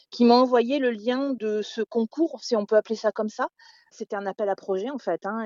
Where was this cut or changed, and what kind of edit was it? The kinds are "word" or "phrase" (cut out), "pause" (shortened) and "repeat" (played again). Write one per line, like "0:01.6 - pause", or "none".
none